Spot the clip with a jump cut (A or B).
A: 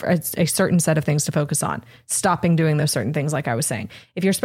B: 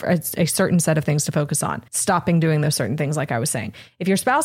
B